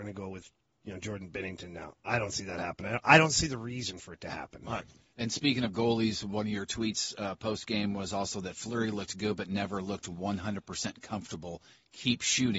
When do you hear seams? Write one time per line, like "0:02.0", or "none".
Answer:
none